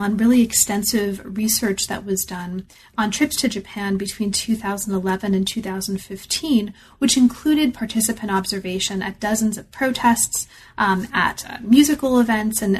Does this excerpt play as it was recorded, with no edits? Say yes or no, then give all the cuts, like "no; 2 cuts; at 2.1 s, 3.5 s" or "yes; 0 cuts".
yes; 0 cuts